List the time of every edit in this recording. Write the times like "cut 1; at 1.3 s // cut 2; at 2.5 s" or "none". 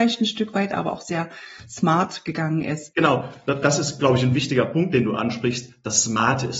none